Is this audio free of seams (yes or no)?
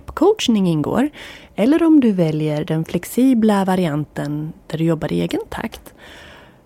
yes